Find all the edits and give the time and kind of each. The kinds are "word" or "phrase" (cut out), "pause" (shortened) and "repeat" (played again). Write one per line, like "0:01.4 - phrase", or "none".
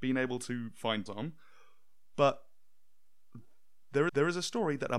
0:01.1 - phrase
0:04.1 - repeat